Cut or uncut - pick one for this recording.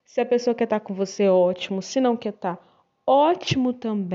uncut